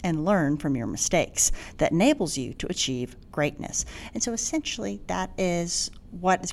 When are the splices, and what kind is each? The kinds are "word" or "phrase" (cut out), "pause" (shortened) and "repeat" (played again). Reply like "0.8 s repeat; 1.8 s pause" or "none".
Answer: none